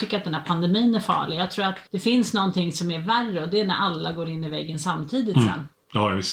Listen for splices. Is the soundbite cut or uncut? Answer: cut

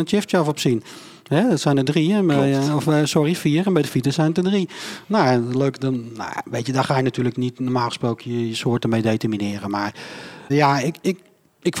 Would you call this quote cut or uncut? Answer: cut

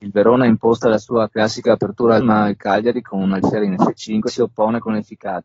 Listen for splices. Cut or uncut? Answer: cut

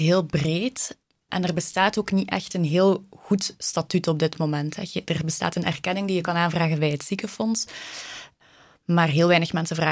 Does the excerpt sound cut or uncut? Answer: uncut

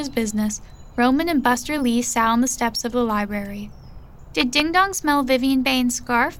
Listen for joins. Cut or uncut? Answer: uncut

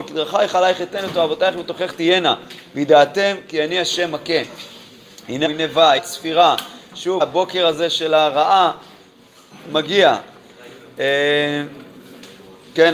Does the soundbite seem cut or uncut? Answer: cut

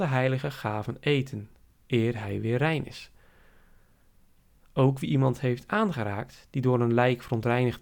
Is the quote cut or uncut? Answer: uncut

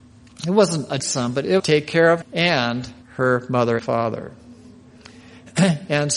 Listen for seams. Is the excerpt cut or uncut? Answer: cut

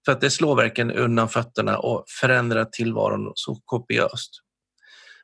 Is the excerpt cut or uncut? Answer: uncut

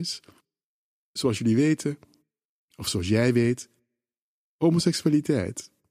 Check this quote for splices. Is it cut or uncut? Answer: uncut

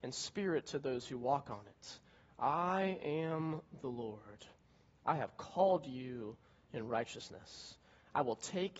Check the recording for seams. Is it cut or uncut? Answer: uncut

